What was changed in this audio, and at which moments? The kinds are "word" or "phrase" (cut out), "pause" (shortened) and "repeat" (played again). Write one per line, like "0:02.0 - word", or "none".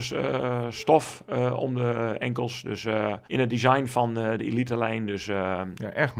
0:03.3 - pause